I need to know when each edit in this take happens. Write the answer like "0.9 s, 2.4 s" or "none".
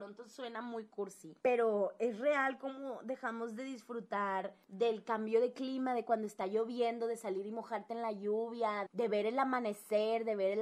1.4 s, 4.6 s, 8.9 s